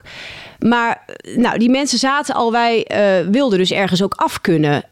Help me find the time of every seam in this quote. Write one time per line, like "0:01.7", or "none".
none